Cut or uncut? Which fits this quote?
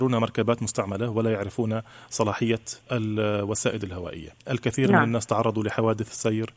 cut